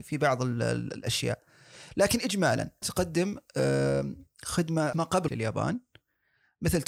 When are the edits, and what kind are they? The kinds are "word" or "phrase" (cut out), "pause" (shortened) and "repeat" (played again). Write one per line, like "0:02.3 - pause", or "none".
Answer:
0:02.8 - word
0:04.9 - word
0:05.3 - word